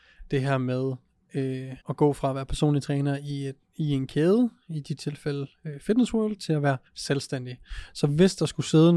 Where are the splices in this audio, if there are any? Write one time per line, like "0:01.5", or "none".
0:01.8
0:06.9